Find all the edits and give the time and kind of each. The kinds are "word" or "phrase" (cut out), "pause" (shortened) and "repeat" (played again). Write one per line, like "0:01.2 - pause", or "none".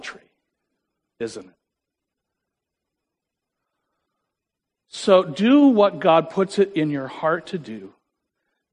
none

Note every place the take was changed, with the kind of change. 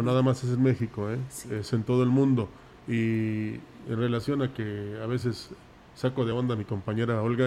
none

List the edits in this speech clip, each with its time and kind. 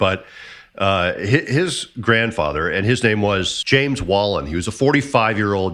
none

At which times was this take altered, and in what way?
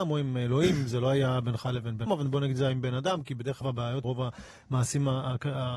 0:02.1 - word
0:03.6 - word
0:04.0 - word

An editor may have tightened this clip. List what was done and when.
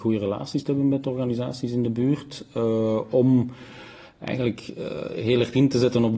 none

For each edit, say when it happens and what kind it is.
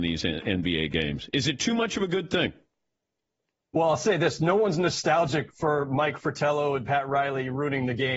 none

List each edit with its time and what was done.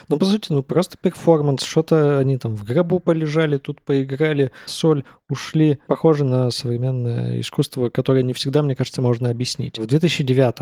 0:04.7 - word
0:05.9 - word

